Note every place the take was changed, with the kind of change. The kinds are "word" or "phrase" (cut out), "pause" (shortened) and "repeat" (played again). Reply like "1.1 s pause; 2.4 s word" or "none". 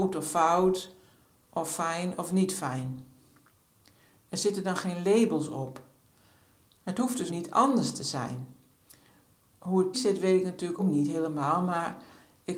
7.3 s word; 9.9 s word; 10.8 s word